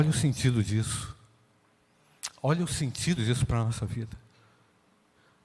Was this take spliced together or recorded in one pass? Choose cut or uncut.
cut